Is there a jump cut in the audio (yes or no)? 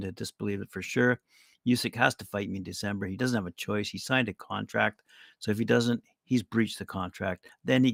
no